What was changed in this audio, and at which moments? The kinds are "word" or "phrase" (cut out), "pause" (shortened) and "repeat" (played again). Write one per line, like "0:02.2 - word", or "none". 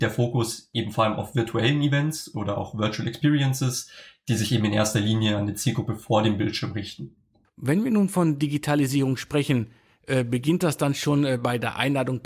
none